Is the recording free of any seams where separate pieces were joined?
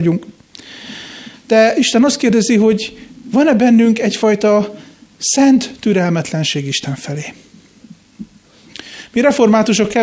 yes; 0 cuts

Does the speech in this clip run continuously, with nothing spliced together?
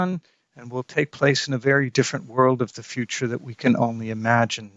yes; 0 cuts

